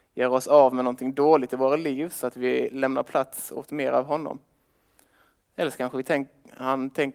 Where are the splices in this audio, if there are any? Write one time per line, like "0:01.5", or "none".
none